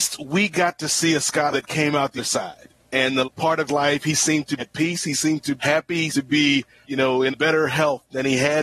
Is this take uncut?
no; 9 cuts; at 1.5 s, 2.2 s, 3.2 s, 3.7 s, 4.6 s, 5.6 s, 6.1 s, 6.8 s, 7.3 s

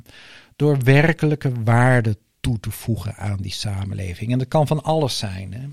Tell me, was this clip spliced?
no; 0 cuts

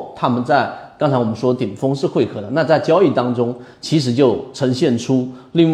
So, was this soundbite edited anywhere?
no; 0 cuts

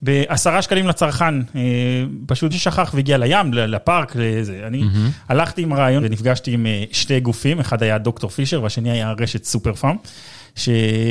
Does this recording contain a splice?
yes; 2 cuts; at 2.5 s, 6.0 s

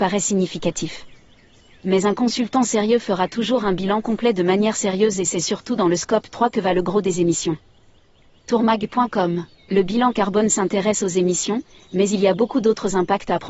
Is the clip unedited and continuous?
yes; 0 cuts

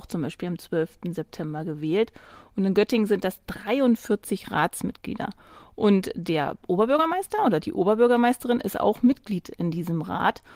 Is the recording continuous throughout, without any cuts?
yes; 0 cuts

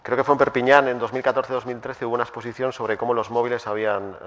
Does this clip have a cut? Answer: no; 0 cuts

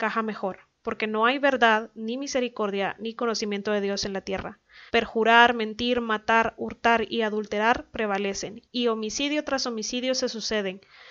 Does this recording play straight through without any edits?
no; 2 cuts; at 4.9 s, 8.7 s

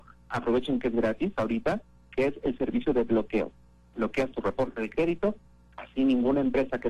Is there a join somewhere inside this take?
no; 0 cuts

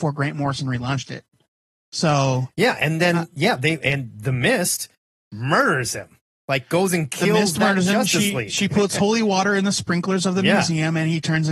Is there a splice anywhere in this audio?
no; 0 cuts

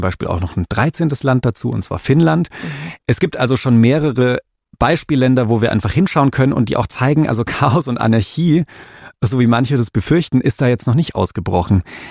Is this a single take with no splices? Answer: yes; 0 cuts

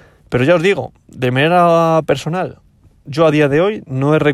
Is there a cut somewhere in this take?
no; 0 cuts

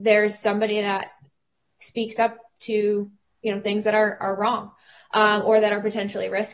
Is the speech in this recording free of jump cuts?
yes; 0 cuts

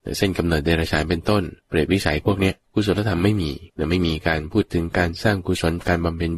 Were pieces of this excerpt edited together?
yes; 3 cuts; at 1.6 s, 2.6 s, 3.7 s

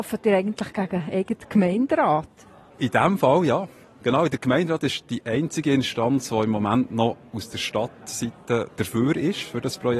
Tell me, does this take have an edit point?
no; 0 cuts

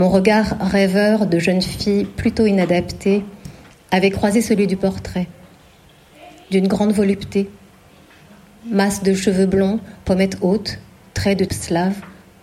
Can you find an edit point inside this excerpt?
yes; 1 cut; at 11.5 s

